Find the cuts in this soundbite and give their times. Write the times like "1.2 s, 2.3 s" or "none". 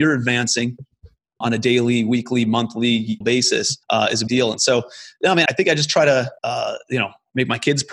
1.4 s, 3.2 s, 3.8 s, 4.3 s, 5.5 s, 6.4 s